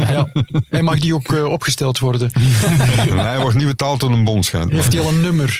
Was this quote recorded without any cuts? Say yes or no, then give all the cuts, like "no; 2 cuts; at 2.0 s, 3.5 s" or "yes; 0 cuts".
yes; 0 cuts